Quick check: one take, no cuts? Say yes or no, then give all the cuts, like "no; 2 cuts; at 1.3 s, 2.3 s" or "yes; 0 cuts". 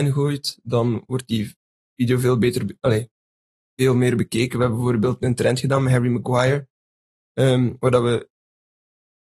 yes; 0 cuts